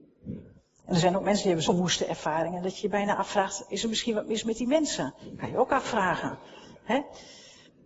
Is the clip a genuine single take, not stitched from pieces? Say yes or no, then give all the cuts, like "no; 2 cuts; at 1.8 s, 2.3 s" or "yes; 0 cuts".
no; 1 cut; at 1.7 s